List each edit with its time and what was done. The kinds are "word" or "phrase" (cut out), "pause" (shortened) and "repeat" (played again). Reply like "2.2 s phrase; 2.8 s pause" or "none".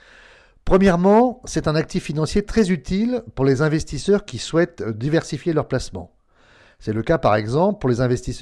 none

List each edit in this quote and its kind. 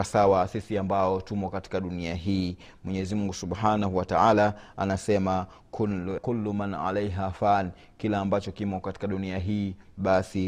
6.2 s word

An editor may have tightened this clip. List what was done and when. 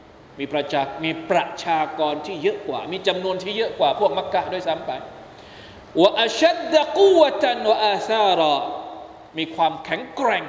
5.9 s pause; 9.3 s pause

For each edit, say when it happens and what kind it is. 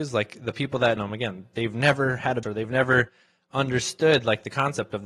1.0 s word; 2.4 s word

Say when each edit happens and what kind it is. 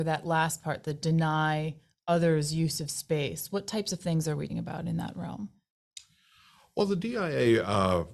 4.5 s word

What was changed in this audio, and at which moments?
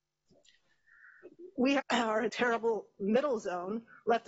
1.8 s word; 2.3 s word

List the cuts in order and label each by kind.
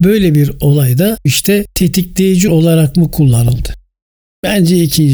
1.3 s word; 2.5 s word

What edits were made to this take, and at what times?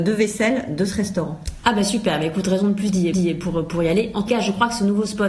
3.1 s repeat; 4.3 s word

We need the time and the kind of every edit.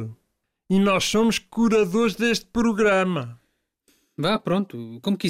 none

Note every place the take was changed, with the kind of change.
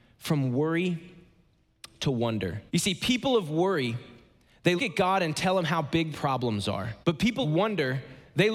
2.7 s pause; 4.8 s word; 6.1 s word; 7.0 s pause; 7.4 s word

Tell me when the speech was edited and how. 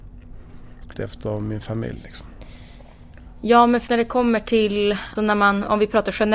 0.9 s word; 3.9 s word; 5.1 s word

